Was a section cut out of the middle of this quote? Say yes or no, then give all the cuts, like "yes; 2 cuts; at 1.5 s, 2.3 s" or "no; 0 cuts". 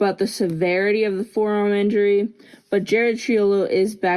no; 0 cuts